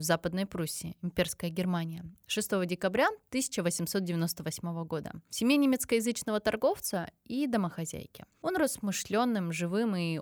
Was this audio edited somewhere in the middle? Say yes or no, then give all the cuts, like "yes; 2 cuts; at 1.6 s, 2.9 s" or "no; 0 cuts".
yes; 1 cut; at 8.3 s